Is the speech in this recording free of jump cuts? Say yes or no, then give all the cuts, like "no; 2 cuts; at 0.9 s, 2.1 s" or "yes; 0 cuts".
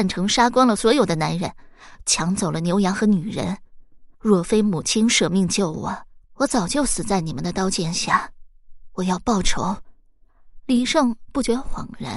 no; 2 cuts; at 4.1 s, 6.2 s